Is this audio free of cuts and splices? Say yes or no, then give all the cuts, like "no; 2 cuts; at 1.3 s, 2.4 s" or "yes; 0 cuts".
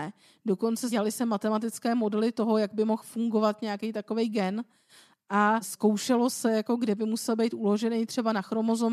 yes; 0 cuts